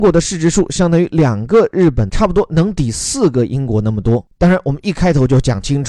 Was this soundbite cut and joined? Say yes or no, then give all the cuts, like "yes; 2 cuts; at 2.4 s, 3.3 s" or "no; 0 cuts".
yes; 1 cut; at 2.1 s